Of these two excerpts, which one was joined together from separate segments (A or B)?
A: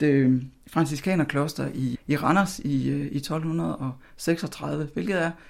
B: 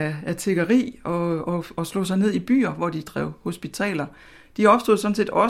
A